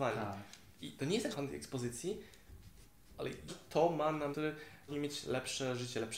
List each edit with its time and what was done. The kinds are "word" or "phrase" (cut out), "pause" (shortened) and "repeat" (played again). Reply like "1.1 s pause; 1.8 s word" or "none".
1.3 s phrase; 3.5 s phrase; 4.3 s phrase; 4.9 s word